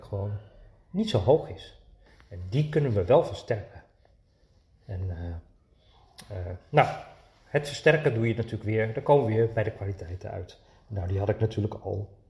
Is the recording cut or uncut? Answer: uncut